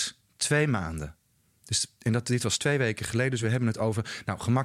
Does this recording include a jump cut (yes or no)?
no